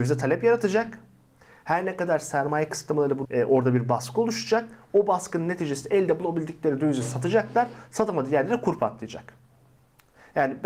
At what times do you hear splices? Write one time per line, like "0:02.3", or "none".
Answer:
0:03.2